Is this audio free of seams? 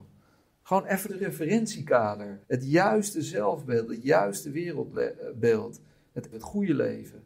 no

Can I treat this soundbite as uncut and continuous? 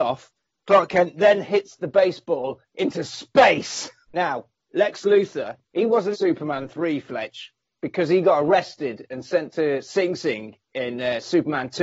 no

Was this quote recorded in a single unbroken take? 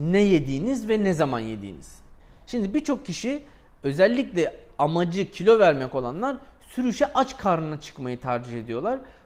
yes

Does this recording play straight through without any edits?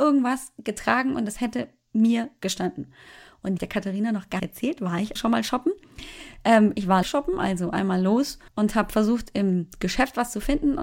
no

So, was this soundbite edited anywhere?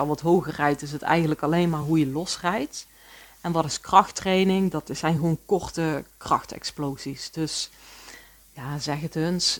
no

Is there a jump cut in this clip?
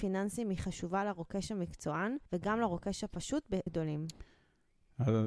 yes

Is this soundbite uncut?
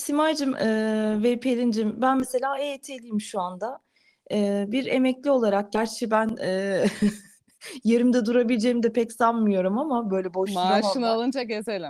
yes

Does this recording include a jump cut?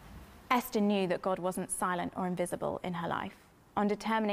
no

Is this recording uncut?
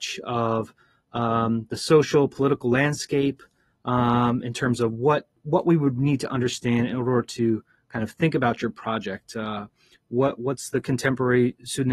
yes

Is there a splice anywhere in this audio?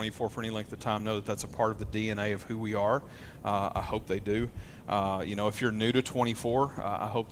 no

